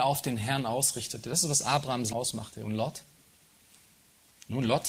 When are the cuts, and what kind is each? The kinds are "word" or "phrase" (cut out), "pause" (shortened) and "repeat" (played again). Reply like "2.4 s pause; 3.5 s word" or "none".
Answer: 2.1 s word